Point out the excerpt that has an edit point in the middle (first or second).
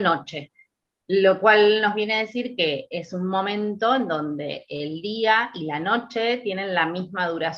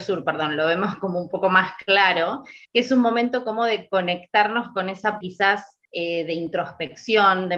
second